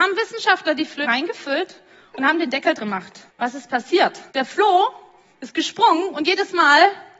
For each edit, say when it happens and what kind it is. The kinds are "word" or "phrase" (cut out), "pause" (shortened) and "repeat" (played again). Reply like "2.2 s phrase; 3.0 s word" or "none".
1.0 s word; 2.8 s word; 3.3 s pause; 4.3 s pause